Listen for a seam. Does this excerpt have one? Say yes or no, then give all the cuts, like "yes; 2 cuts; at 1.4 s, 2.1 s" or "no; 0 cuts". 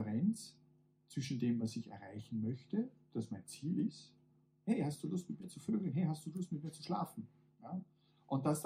no; 0 cuts